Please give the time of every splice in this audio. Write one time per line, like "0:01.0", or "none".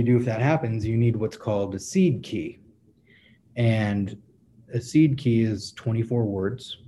none